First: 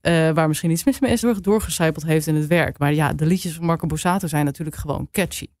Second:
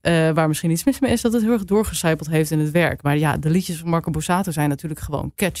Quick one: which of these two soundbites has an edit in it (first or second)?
first